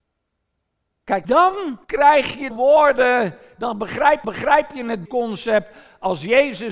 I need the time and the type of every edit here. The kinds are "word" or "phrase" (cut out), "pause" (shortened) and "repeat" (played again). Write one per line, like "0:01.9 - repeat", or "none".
0:01.2 - word
0:01.8 - pause
0:02.5 - phrase
0:04.2 - repeat
0:05.0 - phrase

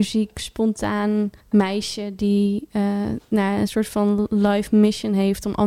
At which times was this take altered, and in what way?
0:01.4 - pause

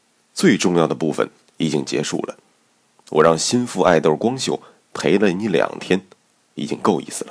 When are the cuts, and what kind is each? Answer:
none

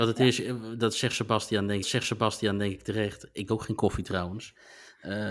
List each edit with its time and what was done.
0:01.8 - repeat
0:03.5 - word

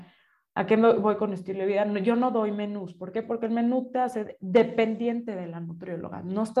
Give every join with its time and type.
none

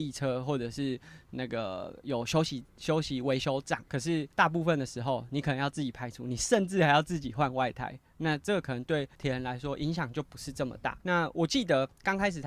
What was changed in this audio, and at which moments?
0:02.7 - pause
0:03.9 - pause
0:04.3 - pause
0:09.1 - pause
0:11.0 - pause

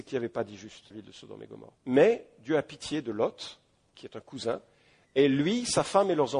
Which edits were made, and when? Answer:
0:00.9 - phrase
0:01.8 - pause

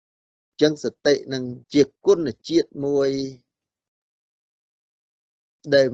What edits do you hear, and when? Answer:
0:01.6 - pause

